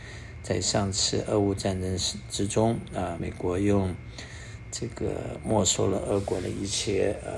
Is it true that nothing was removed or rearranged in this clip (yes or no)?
no